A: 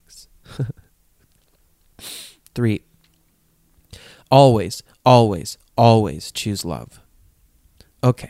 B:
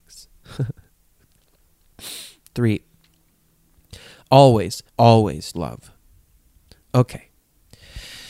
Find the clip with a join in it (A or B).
B